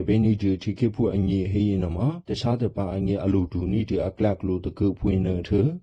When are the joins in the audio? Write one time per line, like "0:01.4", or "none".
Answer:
0:02.2